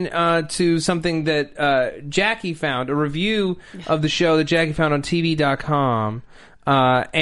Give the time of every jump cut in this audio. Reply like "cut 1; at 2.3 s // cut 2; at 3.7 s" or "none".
none